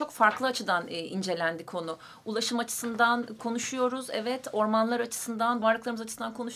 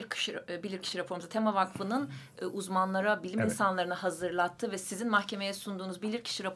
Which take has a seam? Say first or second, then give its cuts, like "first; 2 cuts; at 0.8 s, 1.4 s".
first; 1 cut; at 5.6 s